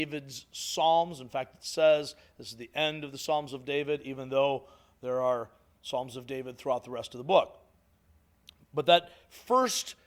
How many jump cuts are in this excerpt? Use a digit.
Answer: 0